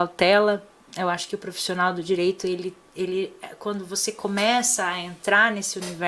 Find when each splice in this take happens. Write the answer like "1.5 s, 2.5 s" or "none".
none